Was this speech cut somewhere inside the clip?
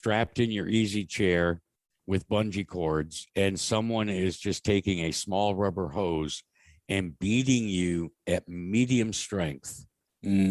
yes; 1 cut; at 3.3 s

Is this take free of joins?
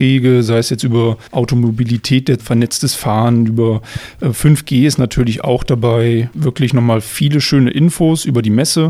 no; 2 cuts; at 1.3 s, 2.4 s

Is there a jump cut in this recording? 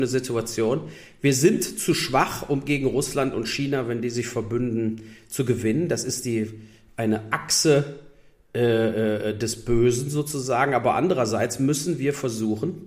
no; 0 cuts

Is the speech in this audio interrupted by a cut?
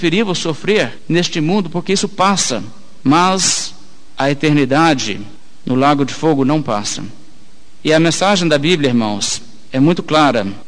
no; 0 cuts

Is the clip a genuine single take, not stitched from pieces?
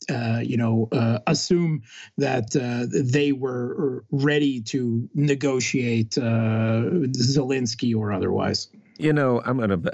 yes; 0 cuts

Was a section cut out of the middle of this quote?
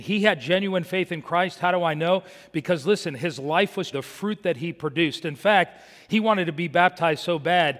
yes; 1 cut; at 3.9 s

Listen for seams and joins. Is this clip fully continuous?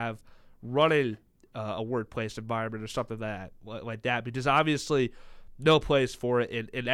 yes; 0 cuts

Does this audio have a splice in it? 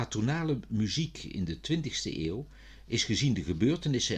no; 0 cuts

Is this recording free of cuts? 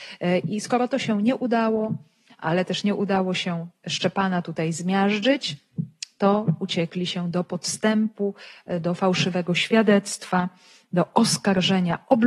yes; 0 cuts

